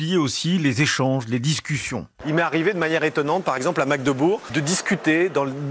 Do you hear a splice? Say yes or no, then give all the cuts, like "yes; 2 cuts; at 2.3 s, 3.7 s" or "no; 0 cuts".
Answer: no; 0 cuts